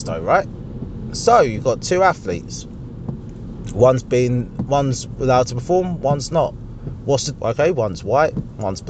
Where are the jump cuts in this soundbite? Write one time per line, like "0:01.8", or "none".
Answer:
0:07.3